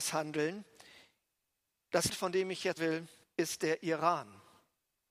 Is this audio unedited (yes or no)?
no